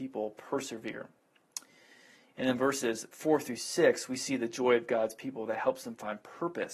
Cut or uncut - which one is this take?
cut